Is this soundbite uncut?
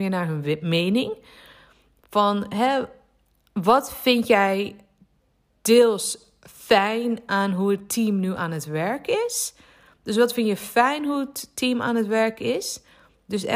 yes; 0 cuts

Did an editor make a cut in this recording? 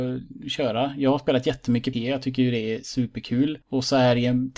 yes; 2 cuts; at 1.9 s, 3.6 s

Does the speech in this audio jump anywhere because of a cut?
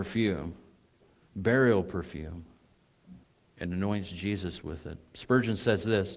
yes; 1 cut; at 3.2 s

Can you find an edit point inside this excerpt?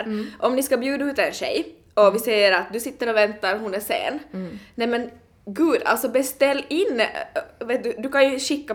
no; 0 cuts

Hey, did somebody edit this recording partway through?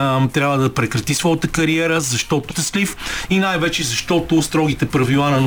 yes; 1 cut; at 2.5 s

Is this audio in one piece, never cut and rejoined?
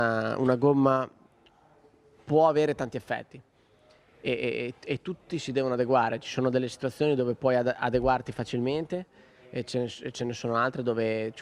yes; 0 cuts

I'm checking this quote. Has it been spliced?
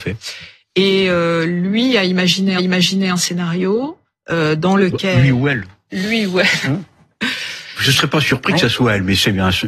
yes; 2 cuts; at 2.6 s, 4.0 s

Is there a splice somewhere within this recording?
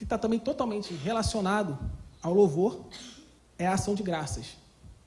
yes; 1 cut; at 3.4 s

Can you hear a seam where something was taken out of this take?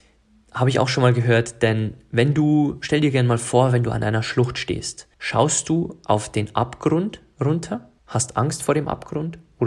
yes; 2 cuts; at 5.1 s, 8.0 s

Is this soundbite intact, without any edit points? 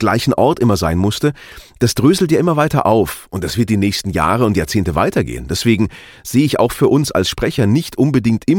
yes; 0 cuts

